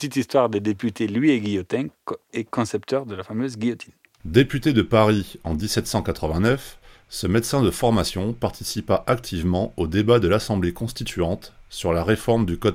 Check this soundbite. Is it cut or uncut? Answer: uncut